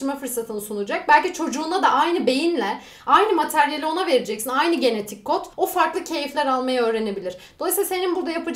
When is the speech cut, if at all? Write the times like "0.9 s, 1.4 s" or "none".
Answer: 5.5 s